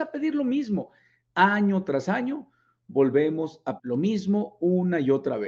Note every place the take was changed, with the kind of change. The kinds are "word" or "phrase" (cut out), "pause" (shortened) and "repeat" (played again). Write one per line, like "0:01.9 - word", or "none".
0:03.8 - word